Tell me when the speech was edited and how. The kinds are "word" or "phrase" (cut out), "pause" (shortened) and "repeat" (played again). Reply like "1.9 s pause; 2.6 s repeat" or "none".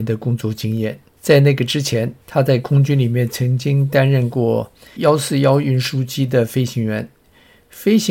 1.1 s pause; 2.2 s pause; 5.0 s word